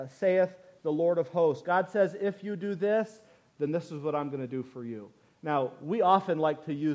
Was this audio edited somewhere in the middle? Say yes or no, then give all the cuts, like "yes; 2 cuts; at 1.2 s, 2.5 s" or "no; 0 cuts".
no; 0 cuts